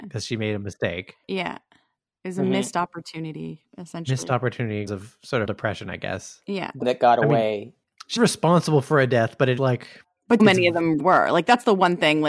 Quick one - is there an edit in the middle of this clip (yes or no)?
yes